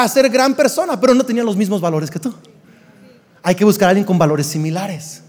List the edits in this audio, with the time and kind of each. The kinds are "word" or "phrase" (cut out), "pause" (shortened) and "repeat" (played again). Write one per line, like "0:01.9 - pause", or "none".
none